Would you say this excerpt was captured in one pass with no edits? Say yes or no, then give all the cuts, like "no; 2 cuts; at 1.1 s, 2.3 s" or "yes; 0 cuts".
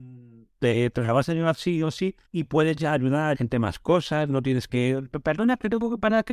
no; 3 cuts; at 2.3 s, 3.3 s, 4.7 s